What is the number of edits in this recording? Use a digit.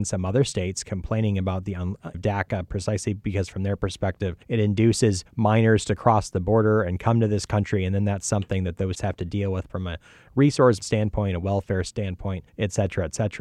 7